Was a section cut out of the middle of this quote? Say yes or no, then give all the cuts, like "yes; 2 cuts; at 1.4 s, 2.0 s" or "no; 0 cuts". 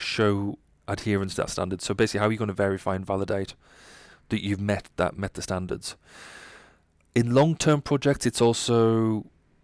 no; 0 cuts